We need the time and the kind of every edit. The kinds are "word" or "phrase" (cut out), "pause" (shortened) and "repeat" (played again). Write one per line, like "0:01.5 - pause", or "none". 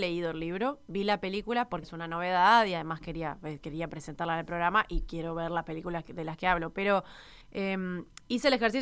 0:01.8 - word
0:07.4 - pause